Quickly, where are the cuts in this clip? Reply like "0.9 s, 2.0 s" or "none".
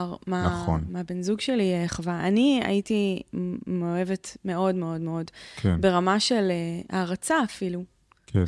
none